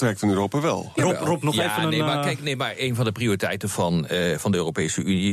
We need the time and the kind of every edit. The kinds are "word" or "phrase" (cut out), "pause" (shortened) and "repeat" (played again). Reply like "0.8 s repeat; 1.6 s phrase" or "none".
none